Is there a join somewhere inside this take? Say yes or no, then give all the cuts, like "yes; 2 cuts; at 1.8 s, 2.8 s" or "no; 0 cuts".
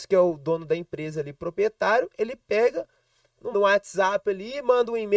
yes; 1 cut; at 3.5 s